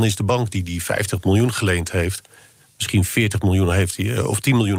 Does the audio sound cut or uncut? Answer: uncut